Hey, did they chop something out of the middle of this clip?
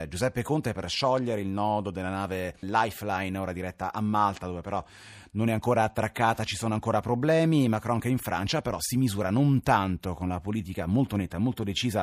yes; 1 cut; at 2.6 s

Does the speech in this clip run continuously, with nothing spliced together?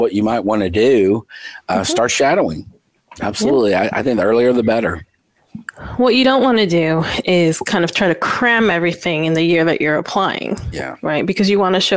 yes; 0 cuts

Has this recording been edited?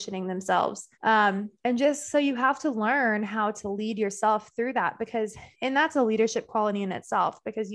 yes; 2 cuts; at 0.9 s, 5.5 s

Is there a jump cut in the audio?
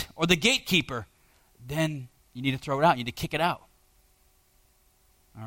yes; 1 cut; at 2.2 s

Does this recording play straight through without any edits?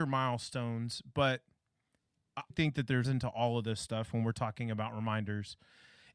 no; 2 cuts; at 2.5 s, 3.0 s

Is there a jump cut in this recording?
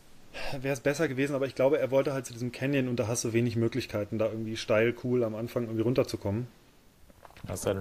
no; 0 cuts

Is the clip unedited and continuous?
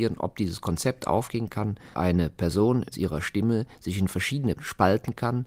no; 3 cuts; at 1.9 s, 2.9 s, 4.6 s

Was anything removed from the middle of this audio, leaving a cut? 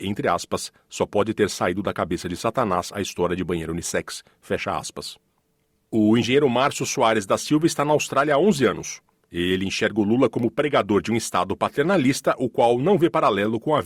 no; 0 cuts

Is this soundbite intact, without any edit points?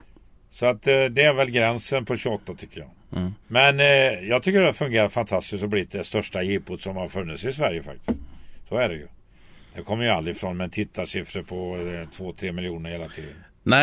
no; 1 cut; at 3.4 s

